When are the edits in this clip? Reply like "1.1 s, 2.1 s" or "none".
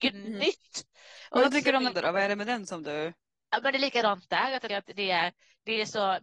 1.9 s, 4.7 s

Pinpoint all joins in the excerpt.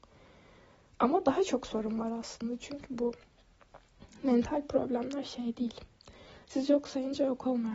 none

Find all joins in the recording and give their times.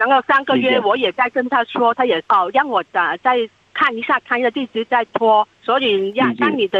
2.2 s, 5.5 s

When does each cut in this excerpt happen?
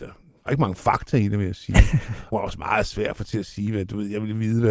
2.3 s

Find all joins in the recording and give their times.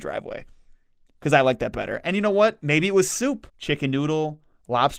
3.5 s

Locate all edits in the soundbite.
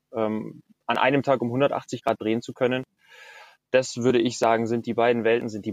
none

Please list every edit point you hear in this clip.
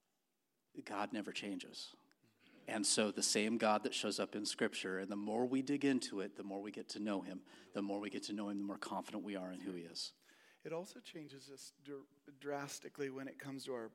none

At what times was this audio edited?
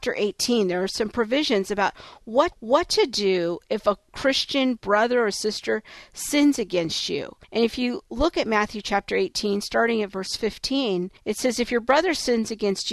2.5 s, 7.4 s, 11.2 s

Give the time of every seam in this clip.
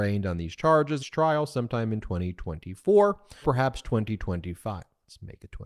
1.0 s, 3.4 s

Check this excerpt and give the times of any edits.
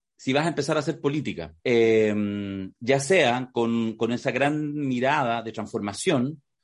1.6 s

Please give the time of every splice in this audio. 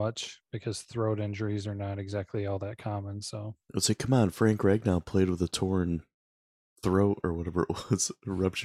3.6 s

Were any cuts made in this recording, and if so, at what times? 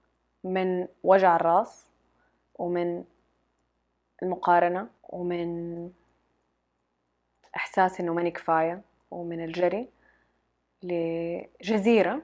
5.0 s

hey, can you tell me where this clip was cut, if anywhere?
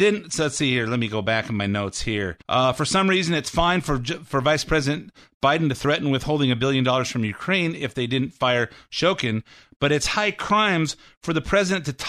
2.4 s

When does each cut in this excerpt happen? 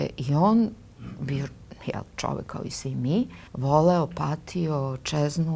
3.5 s

